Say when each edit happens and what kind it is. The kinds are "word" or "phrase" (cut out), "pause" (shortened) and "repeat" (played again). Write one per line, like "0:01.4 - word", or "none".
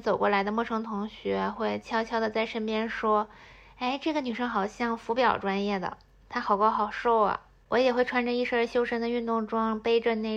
none